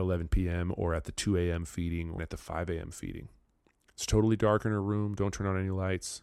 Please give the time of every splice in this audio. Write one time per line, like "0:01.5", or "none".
0:02.2